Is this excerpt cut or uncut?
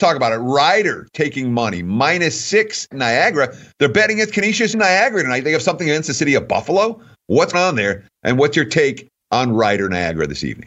cut